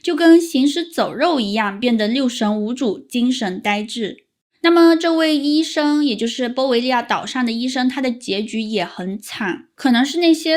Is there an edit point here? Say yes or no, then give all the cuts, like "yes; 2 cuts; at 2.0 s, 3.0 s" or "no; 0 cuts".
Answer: no; 0 cuts